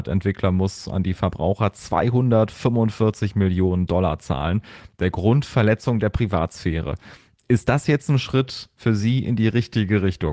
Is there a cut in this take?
no; 0 cuts

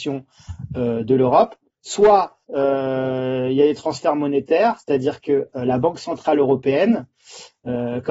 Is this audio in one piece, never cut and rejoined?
no; 1 cut; at 2.4 s

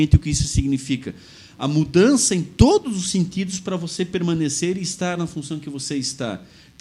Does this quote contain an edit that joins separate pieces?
no; 0 cuts

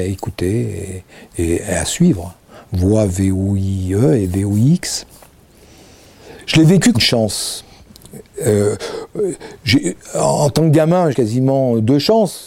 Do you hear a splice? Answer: yes; 2 cuts; at 6.9 s, 11.1 s

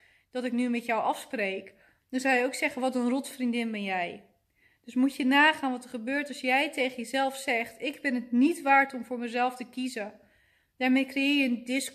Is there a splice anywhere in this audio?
no; 0 cuts

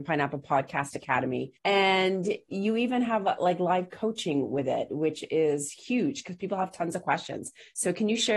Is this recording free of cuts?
no; 1 cut; at 1.6 s

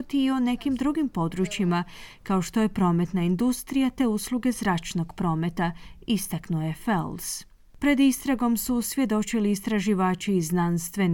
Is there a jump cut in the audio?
no; 0 cuts

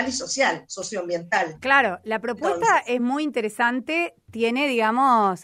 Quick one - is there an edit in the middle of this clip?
no; 0 cuts

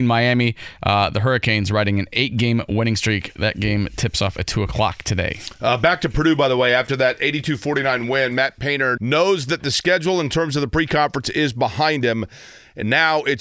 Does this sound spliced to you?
yes; 1 cut; at 9.0 s

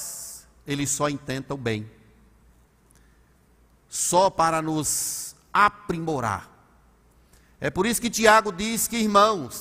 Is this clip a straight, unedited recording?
yes; 0 cuts

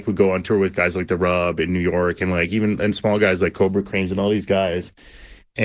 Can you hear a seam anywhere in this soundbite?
no; 0 cuts

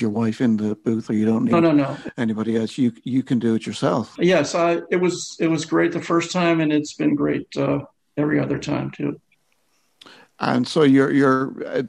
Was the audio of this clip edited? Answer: no; 0 cuts

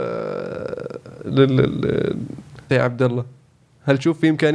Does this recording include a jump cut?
yes; 1 cut; at 2.7 s

